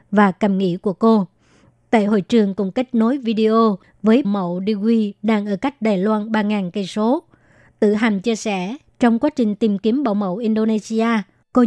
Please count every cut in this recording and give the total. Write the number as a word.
one